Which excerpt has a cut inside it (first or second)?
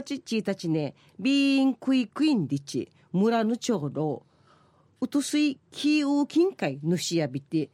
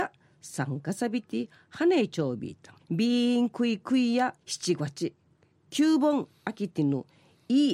second